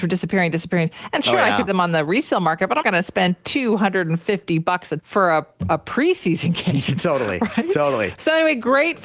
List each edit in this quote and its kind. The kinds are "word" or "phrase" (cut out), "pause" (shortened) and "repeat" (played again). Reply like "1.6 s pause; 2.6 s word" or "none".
1.7 s word; 2.8 s word; 5.0 s word

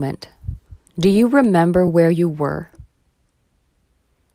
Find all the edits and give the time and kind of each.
none

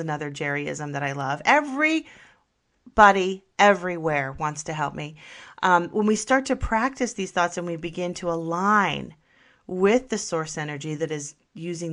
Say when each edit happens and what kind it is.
none

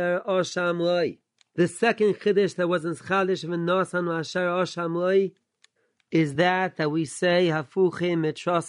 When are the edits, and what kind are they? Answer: none

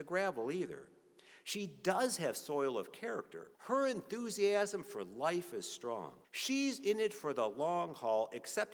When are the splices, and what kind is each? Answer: 3.5 s pause; 6.2 s pause

